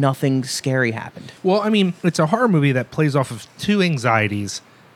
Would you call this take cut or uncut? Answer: cut